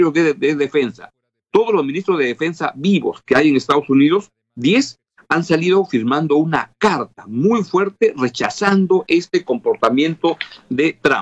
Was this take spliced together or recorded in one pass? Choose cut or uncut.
uncut